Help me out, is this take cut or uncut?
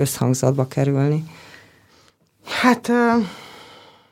cut